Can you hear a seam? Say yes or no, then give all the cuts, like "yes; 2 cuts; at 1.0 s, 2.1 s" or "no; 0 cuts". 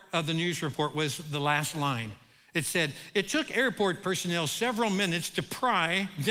no; 0 cuts